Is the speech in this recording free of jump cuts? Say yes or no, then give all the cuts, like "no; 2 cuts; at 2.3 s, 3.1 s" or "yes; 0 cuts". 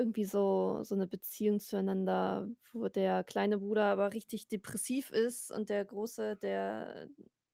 yes; 0 cuts